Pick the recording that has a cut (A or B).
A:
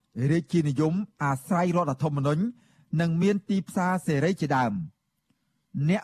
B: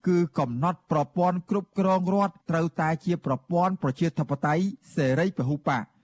B